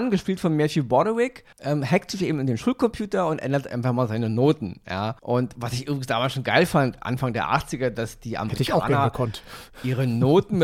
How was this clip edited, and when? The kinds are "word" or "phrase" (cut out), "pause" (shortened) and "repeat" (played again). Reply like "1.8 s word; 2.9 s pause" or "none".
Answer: 1.5 s pause; 5.2 s pause